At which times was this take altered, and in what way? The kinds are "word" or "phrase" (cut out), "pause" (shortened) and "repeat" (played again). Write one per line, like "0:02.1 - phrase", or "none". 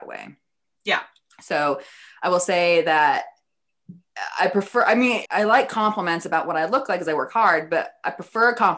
0:05.2 - word